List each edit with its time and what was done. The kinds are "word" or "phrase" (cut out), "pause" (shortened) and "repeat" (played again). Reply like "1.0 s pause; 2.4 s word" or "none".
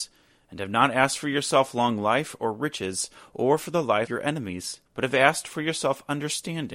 4.1 s word; 4.8 s pause